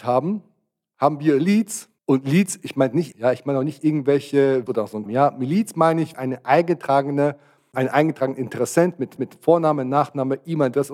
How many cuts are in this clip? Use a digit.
6